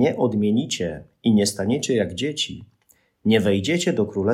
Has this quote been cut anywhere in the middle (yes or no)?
no